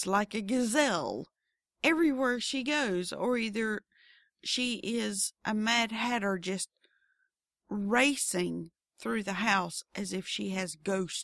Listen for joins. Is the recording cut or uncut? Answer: uncut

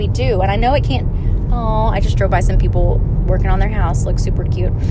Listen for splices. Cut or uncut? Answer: uncut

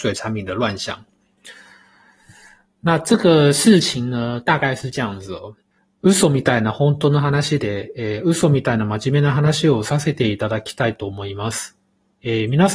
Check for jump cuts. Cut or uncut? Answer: uncut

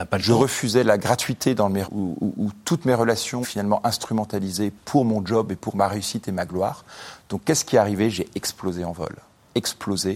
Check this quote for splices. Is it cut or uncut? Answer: cut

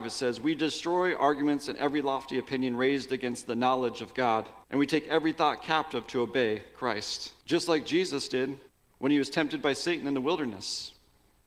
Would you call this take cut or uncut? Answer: cut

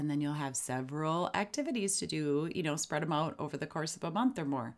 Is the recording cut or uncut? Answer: uncut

